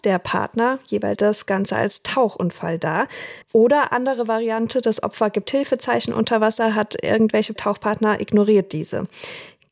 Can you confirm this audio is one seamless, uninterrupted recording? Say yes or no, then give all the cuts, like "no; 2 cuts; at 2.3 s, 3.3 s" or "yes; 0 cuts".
no; 3 cuts; at 1.2 s, 3.4 s, 7.6 s